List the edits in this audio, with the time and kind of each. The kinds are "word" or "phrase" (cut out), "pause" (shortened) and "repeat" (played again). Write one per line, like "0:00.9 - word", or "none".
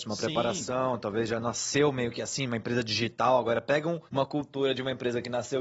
0:04.1 - pause